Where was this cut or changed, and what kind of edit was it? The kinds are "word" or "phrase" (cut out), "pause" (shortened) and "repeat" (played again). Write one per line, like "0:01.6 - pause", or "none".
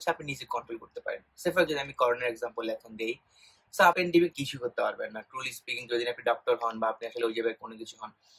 0:01.7 - word
0:03.9 - phrase
0:04.3 - word